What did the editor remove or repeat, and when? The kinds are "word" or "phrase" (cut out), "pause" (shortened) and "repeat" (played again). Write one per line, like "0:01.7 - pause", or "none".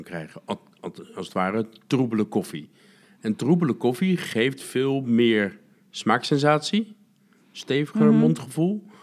none